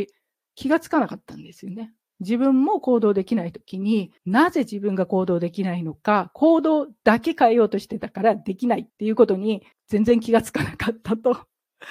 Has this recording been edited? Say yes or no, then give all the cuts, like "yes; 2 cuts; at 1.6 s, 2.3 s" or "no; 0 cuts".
yes; 3 cuts; at 4.2 s, 8.9 s, 9.7 s